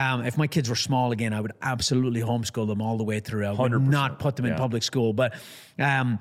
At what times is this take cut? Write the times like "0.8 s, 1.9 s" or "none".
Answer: none